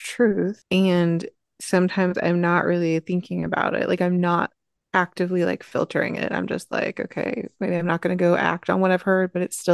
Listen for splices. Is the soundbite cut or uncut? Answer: uncut